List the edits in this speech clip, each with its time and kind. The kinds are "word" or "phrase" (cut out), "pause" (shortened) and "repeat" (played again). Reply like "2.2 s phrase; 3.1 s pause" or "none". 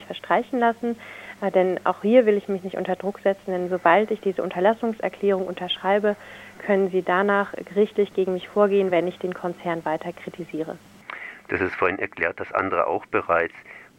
none